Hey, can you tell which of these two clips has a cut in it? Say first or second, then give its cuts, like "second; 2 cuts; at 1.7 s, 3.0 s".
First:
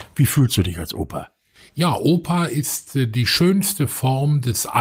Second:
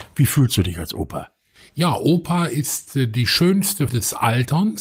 second; 1 cut; at 3.9 s